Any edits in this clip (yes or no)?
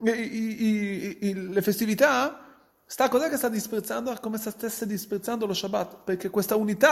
no